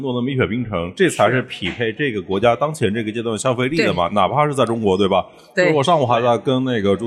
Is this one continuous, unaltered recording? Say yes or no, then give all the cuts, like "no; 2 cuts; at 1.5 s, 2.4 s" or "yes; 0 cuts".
yes; 0 cuts